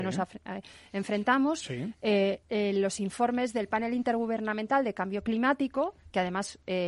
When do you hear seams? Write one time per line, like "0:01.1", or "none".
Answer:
0:02.4